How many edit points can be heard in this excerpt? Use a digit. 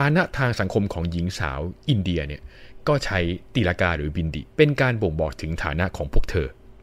1